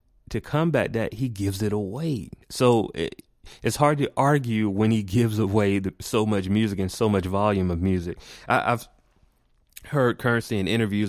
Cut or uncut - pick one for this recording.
cut